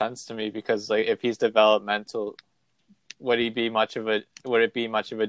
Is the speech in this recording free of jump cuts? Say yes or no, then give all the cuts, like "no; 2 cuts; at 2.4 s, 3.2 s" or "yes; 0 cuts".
yes; 0 cuts